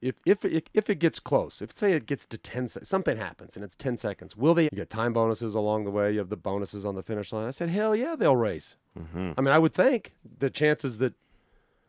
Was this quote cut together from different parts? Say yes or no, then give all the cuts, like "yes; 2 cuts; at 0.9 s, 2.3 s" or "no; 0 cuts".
yes; 1 cut; at 4.7 s